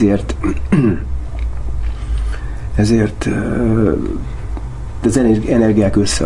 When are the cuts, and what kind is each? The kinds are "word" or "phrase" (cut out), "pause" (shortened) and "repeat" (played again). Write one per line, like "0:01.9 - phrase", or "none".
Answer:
0:05.0 - word

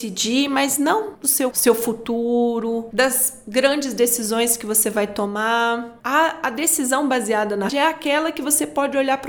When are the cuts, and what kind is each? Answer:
0:01.5 - word
0:07.7 - word

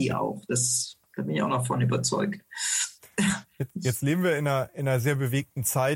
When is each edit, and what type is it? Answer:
0:03.7 - word

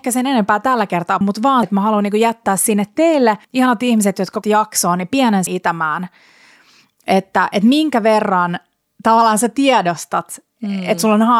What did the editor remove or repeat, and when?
0:01.2 - word
0:01.6 - word
0:03.4 - pause
0:04.4 - word
0:05.5 - phrase
0:08.9 - pause

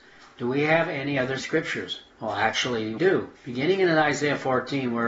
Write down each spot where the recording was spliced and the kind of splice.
0:01.4 - word
0:02.1 - pause
0:03.0 - word
0:03.3 - pause

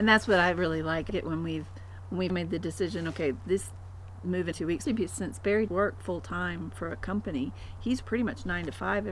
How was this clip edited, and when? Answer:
0:01.1 - word
0:02.3 - word
0:04.5 - word
0:04.9 - word
0:05.7 - word
0:08.0 - word

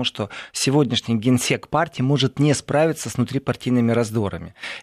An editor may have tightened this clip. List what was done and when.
none

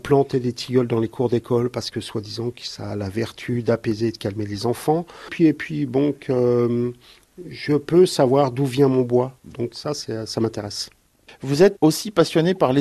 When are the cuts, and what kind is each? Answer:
0:11.8 - word

